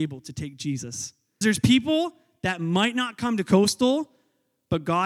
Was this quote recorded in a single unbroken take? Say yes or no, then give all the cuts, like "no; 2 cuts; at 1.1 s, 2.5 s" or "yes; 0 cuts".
no; 1 cut; at 1.4 s